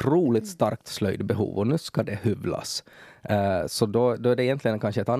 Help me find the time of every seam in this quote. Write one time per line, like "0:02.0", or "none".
none